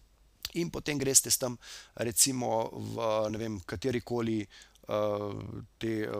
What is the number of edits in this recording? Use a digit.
0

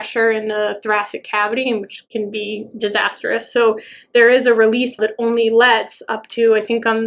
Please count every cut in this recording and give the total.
1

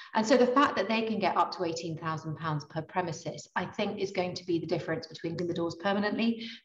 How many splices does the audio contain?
1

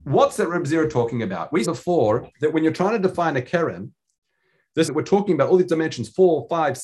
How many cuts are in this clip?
3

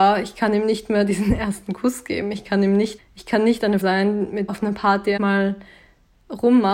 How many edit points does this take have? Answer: 4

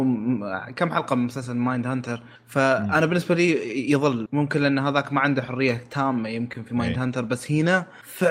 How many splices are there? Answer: 1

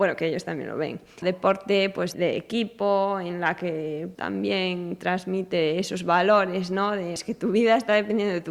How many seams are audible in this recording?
4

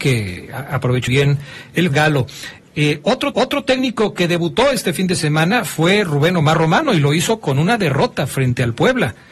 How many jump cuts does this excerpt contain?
3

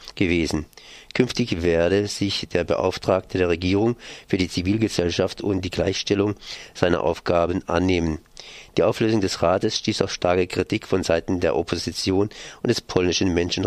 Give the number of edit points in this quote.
0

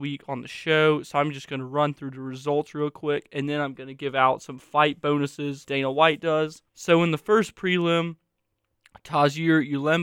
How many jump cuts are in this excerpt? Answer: 2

